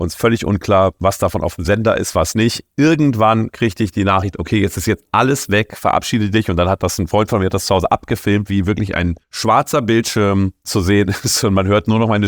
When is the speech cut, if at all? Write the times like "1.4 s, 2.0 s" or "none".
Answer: 9.2 s